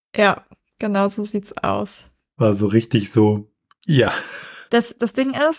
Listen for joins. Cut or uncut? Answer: uncut